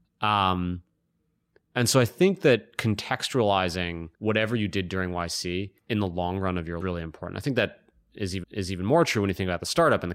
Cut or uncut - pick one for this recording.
cut